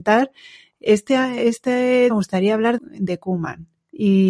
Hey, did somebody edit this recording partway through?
yes; 2 cuts; at 2.1 s, 2.8 s

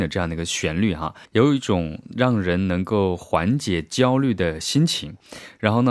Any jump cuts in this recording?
yes; 1 cut; at 1.3 s

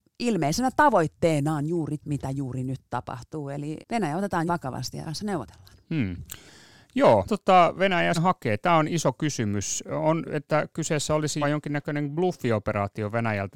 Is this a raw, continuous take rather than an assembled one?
no; 8 cuts; at 2.0 s, 3.8 s, 4.5 s, 5.0 s, 7.2 s, 8.1 s, 10.2 s, 11.4 s

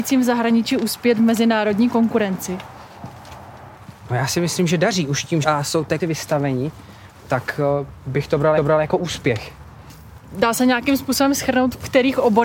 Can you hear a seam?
yes; 3 cuts; at 5.4 s, 6.0 s, 8.6 s

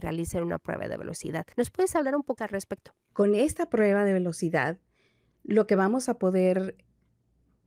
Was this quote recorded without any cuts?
no; 3 cuts; at 1.5 s, 2.4 s, 3.0 s

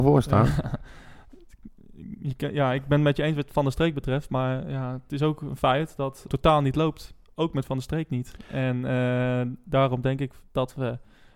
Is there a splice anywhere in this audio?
yes; 1 cut; at 6.3 s

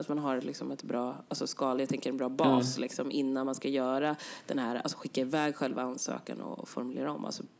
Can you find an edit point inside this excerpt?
no; 0 cuts

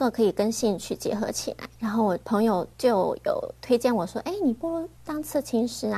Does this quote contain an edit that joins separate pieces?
yes; 3 cuts; at 1.7 s, 2.2 s, 2.7 s

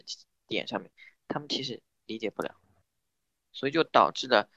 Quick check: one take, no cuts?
yes; 0 cuts

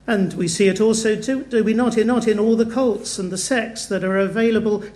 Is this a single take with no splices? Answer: no; 1 cut; at 2.0 s

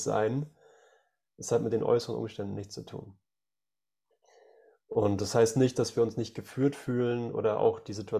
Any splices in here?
no; 0 cuts

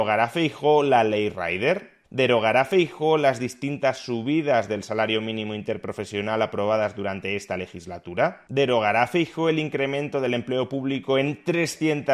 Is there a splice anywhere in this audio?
yes; 1 cut; at 2.0 s

